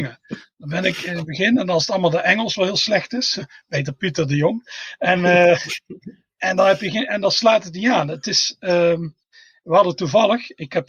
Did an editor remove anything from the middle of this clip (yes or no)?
no